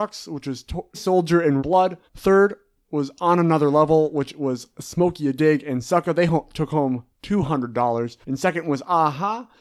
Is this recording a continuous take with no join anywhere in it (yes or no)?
no